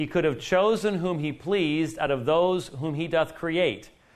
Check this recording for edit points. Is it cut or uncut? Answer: uncut